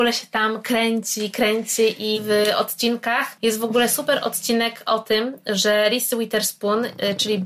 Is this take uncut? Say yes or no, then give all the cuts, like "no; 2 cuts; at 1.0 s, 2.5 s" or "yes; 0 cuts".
no; 2 cuts; at 2.1 s, 2.5 s